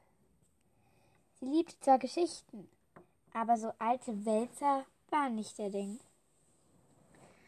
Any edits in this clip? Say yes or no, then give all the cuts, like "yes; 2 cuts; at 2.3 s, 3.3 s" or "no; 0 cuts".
no; 0 cuts